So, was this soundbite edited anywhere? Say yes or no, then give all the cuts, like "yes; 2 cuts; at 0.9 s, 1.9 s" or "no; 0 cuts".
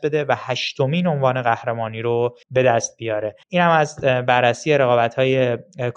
yes; 2 cuts; at 2.4 s, 3.4 s